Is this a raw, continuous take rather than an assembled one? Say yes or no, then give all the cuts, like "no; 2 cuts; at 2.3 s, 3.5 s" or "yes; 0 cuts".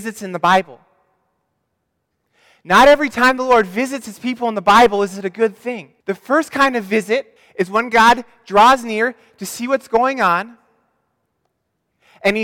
no; 2 cuts; at 6.0 s, 7.4 s